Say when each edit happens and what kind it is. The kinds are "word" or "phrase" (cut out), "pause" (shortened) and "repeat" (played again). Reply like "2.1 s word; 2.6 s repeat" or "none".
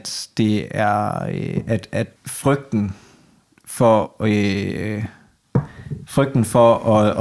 2.1 s pause

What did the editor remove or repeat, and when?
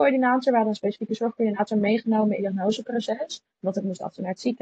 2.4 s phrase; 3.5 s pause

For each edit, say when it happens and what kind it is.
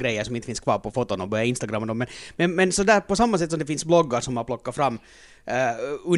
none

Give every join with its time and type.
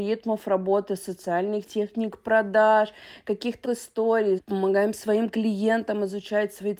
1.6 s word; 3.6 s word; 4.4 s phrase

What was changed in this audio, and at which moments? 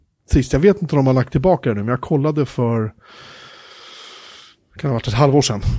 none

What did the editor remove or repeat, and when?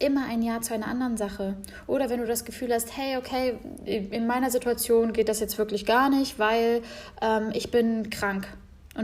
none

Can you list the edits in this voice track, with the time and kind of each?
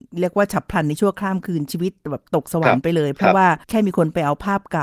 3.6 s pause

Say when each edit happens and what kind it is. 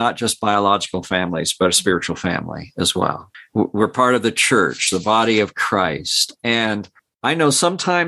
none

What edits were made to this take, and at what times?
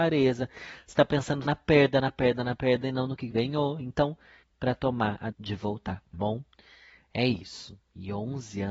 1.4 s word; 3.3 s word; 4.4 s word; 5.3 s word; 6.1 s word

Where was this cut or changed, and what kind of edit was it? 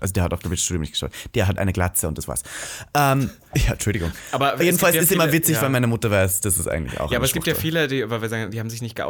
none

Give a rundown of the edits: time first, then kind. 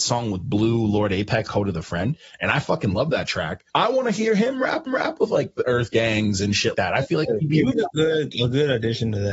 1.5 s word; 3.7 s pause; 4.9 s repeat; 6.7 s word; 7.7 s word

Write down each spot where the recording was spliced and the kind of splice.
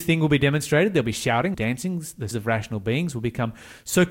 1.5 s phrase; 2.3 s word

